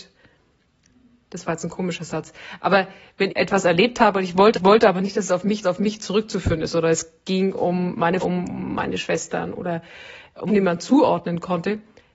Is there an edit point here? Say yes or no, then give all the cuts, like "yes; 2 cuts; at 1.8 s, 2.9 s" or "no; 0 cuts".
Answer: yes; 5 cuts; at 3.3 s, 4.5 s, 5.6 s, 8.2 s, 10.5 s